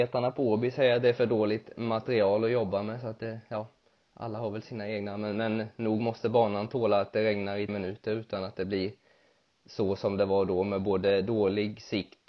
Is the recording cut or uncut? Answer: cut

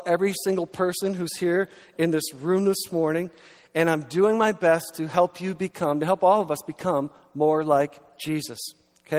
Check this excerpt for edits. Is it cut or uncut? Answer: uncut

